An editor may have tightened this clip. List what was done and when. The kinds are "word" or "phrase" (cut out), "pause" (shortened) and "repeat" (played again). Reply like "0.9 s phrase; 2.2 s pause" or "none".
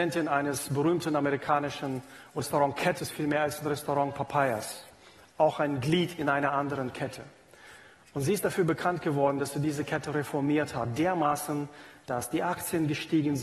2.4 s word; 3.0 s word